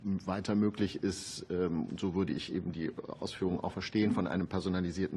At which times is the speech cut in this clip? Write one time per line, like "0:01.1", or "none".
none